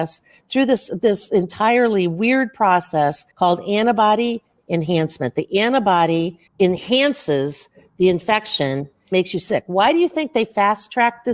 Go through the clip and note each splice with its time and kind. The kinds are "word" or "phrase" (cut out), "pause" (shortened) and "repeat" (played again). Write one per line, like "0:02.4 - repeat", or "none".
0:03.3 - pause
0:04.6 - word
0:06.5 - pause
0:09.1 - word